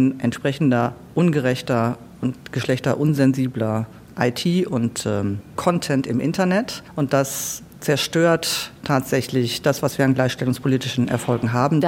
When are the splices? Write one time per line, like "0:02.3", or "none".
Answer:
none